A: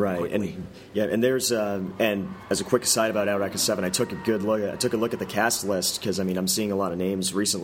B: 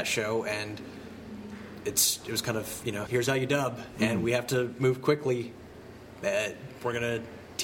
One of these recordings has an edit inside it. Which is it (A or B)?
B